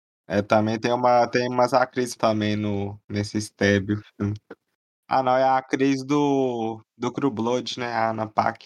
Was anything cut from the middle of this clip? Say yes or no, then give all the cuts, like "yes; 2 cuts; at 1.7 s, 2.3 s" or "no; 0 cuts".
yes; 1 cut; at 2.2 s